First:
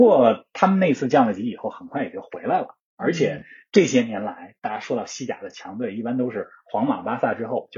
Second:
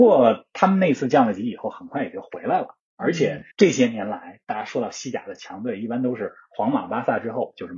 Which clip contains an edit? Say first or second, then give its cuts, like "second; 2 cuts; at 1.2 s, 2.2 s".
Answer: second; 1 cut; at 3.5 s